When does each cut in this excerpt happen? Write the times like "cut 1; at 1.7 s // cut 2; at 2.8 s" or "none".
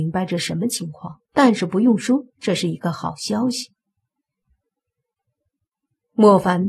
cut 1; at 1.2 s